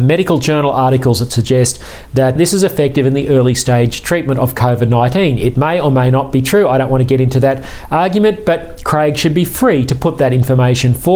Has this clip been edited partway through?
yes; 1 cut; at 2.4 s

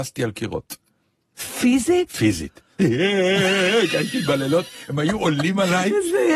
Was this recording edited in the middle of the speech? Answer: no; 0 cuts

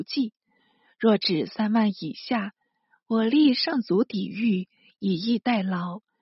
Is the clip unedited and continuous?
yes; 0 cuts

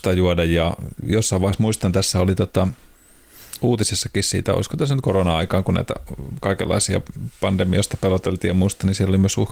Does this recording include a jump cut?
no; 0 cuts

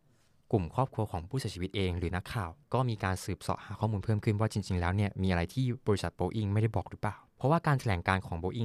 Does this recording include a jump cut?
yes; 2 cuts; at 2.6 s, 7.3 s

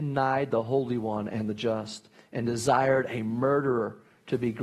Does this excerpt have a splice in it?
no; 0 cuts

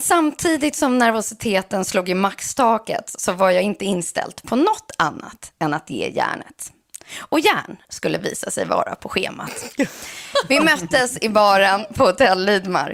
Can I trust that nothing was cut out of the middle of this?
yes; 0 cuts

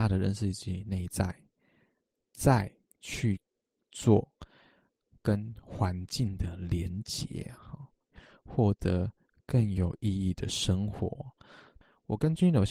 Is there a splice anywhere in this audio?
no; 0 cuts

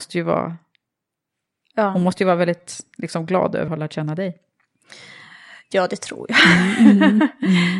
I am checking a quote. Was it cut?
yes; 1 cut; at 3.7 s

